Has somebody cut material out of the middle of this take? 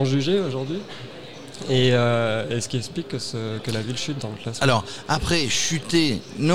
no; 0 cuts

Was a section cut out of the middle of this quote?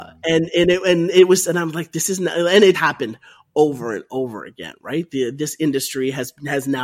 yes; 1 cut; at 2.7 s

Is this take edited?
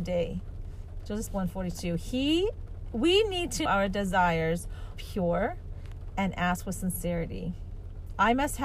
yes; 3 cuts; at 1.3 s, 3.7 s, 4.9 s

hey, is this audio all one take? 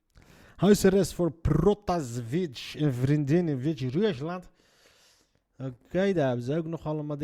yes; 0 cuts

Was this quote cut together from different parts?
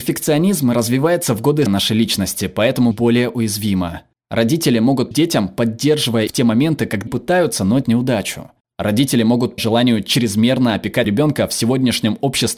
yes; 8 cuts; at 1.7 s, 2.9 s, 5.1 s, 6.3 s, 7.1 s, 7.8 s, 9.6 s, 11.0 s

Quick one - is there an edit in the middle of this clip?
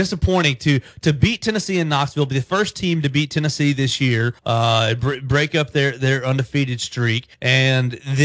yes; 2 cuts; at 4.4 s, 7.3 s

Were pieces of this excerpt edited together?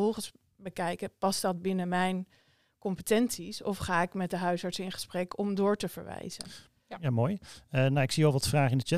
no; 0 cuts

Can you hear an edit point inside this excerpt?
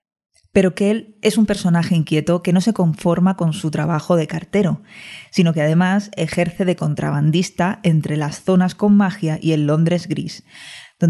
no; 0 cuts

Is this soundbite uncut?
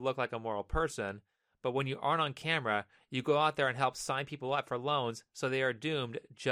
yes; 0 cuts

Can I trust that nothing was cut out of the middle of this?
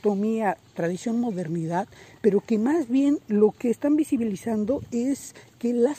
yes; 0 cuts

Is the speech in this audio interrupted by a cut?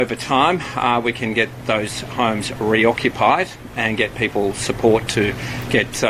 no; 0 cuts

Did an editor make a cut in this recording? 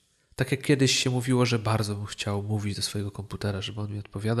no; 0 cuts

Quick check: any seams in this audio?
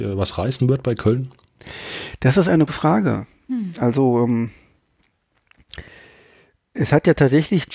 yes; 1 cut; at 2.7 s

